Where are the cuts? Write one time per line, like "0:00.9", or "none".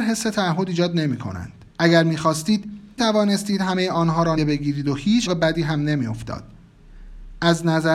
0:01.7
0:03.0
0:04.4
0:05.3